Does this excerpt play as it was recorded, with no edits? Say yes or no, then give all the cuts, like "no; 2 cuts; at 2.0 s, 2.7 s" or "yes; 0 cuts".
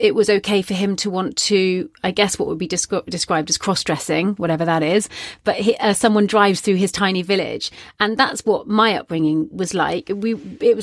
yes; 0 cuts